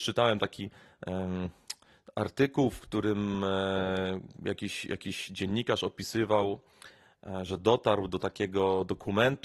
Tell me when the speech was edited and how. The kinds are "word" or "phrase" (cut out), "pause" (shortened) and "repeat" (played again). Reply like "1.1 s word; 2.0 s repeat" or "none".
none